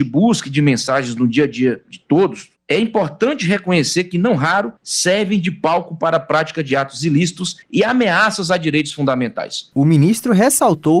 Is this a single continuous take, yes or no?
no